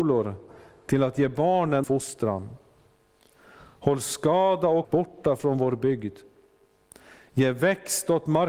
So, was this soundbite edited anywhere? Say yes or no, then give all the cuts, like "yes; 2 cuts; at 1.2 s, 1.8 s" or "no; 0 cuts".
yes; 2 cuts; at 1.8 s, 4.8 s